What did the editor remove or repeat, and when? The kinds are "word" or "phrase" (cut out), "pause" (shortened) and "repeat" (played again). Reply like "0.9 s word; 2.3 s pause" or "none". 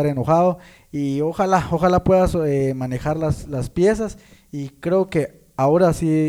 none